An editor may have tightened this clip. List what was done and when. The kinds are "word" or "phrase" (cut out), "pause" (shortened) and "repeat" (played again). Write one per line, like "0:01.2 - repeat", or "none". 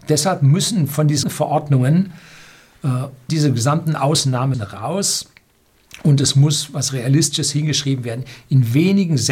0:01.2 - word
0:03.3 - word
0:04.5 - word